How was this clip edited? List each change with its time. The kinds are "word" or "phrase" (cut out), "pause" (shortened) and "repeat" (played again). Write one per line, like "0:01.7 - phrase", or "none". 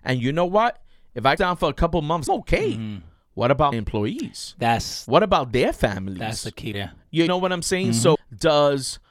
0:01.4 - word
0:02.3 - word
0:03.7 - word
0:06.7 - word
0:07.3 - word
0:08.1 - word